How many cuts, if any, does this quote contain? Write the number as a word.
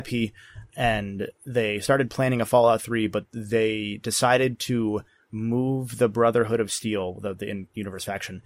zero